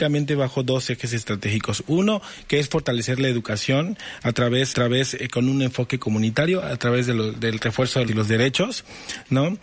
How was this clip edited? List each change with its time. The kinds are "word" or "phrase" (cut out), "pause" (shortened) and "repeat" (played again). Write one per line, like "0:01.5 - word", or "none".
0:04.7 - repeat
0:08.1 - phrase